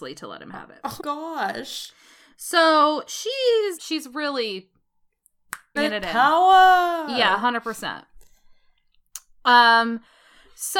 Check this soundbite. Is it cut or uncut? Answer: cut